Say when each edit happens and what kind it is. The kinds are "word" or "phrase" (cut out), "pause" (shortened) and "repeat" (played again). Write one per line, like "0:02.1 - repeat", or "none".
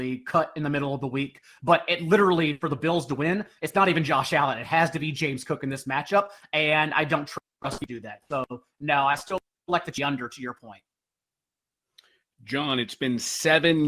none